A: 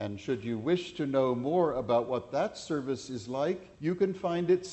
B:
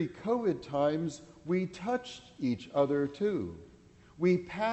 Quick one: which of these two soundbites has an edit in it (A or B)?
A